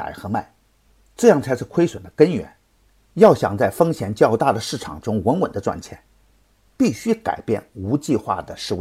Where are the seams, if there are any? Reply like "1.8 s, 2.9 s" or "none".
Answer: none